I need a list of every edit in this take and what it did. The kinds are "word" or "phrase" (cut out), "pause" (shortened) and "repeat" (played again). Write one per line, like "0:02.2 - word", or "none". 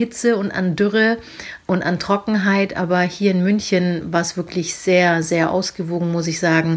none